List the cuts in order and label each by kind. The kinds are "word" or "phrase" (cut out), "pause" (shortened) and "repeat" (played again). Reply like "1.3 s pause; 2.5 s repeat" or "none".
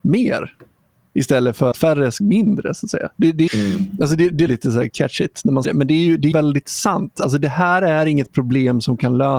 1.7 s word; 2.2 s word; 3.5 s word; 4.5 s word; 4.9 s word; 5.6 s word; 6.3 s word